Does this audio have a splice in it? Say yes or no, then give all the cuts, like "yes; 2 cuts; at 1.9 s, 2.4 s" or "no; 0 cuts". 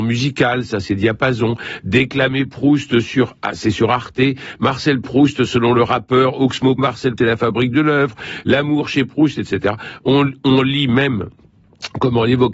yes; 2 cuts; at 6.8 s, 7.2 s